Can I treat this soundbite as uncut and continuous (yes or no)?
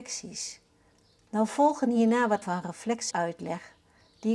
no